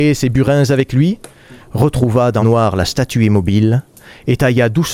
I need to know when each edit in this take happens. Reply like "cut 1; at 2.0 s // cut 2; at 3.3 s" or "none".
cut 1; at 2.4 s